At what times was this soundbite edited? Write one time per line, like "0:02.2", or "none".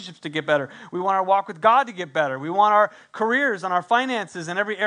none